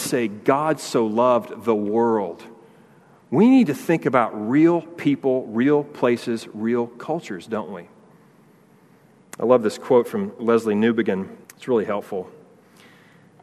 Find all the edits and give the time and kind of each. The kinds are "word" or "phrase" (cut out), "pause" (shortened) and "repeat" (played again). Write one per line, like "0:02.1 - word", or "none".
0:11.4 - pause